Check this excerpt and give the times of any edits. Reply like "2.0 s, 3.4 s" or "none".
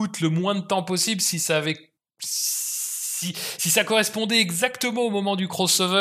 none